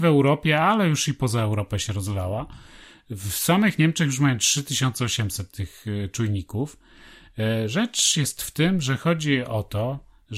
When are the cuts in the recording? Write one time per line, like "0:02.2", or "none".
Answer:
none